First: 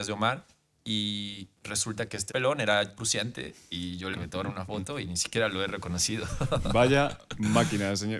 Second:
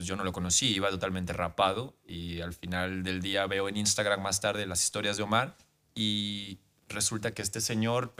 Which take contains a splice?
first; 4 cuts; at 1.5 s, 2.3 s, 3.0 s, 4.1 s

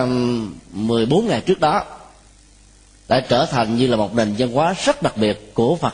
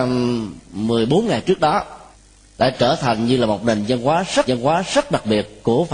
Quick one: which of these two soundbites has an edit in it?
second; 2 cuts; at 2.1 s, 4.5 s

